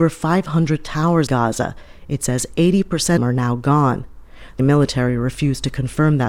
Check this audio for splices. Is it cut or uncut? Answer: cut